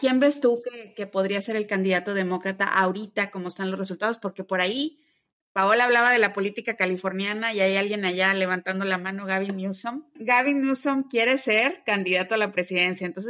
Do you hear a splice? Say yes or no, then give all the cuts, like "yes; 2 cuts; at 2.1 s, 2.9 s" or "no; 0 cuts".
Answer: no; 0 cuts